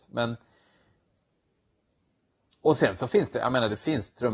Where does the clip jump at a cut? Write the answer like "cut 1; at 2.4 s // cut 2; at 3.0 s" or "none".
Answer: none